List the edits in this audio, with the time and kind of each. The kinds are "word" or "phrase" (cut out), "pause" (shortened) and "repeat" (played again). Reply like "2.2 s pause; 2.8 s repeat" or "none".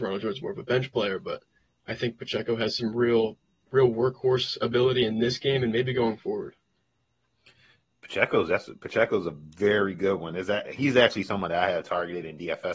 none